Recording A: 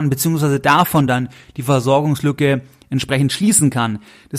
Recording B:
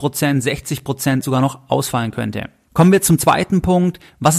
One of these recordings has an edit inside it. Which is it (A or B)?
B